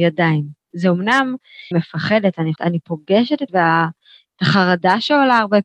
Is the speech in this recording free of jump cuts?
no; 3 cuts; at 1.7 s, 2.6 s, 3.5 s

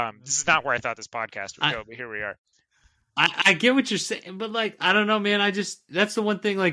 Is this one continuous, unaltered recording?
yes; 0 cuts

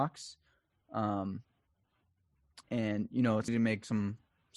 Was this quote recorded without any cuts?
no; 2 cuts; at 2.6 s, 3.5 s

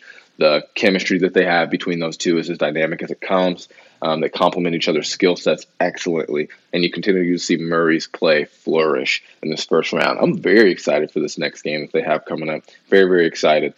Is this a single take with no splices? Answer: yes; 0 cuts

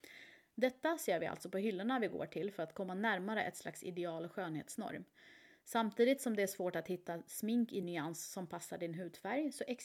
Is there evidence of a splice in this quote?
no; 0 cuts

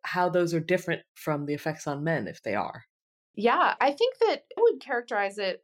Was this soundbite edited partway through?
yes; 2 cuts; at 3.8 s, 4.6 s

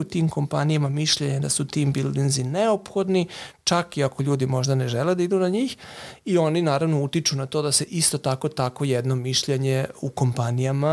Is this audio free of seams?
yes; 0 cuts

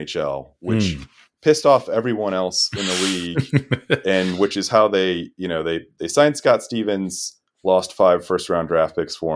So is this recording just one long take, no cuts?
yes; 0 cuts

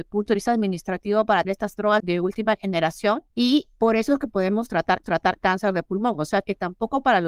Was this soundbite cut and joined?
yes; 4 cuts; at 1.4 s, 2.0 s, 3.3 s, 5.0 s

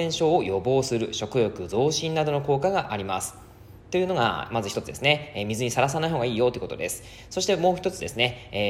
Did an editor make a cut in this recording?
yes; 1 cut; at 3.8 s

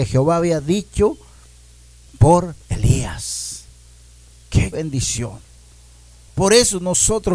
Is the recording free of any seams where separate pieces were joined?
no; 2 cuts; at 2.6 s, 4.7 s

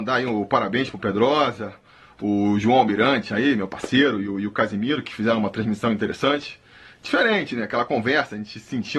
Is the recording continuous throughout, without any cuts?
yes; 0 cuts

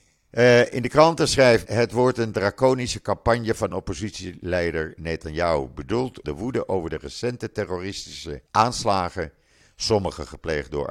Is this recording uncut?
no; 4 cuts; at 1.6 s, 3.7 s, 6.2 s, 8.5 s

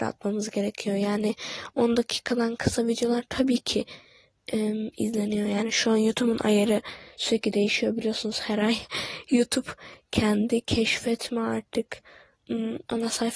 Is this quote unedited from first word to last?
yes; 0 cuts

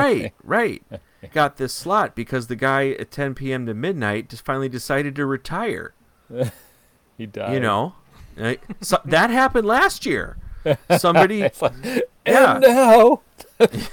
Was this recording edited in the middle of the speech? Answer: yes; 1 cut; at 1.3 s

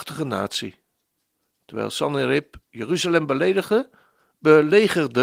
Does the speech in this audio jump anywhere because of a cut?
no; 0 cuts

